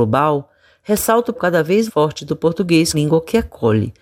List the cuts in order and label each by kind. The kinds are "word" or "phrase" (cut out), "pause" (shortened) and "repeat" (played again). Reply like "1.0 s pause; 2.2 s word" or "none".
1.4 s word; 1.9 s word; 2.9 s word